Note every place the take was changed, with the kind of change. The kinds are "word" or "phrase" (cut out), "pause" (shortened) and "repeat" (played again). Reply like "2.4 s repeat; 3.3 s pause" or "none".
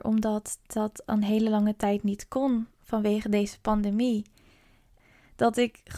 none